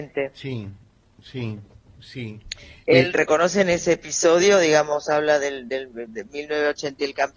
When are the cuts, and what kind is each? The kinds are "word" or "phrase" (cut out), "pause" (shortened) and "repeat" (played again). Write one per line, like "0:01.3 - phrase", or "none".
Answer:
0:03.1 - word